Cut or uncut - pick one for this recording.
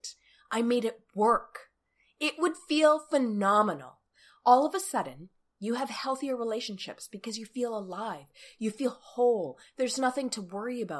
uncut